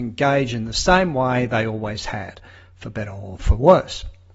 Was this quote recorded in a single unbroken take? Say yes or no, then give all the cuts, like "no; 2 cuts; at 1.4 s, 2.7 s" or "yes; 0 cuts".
yes; 0 cuts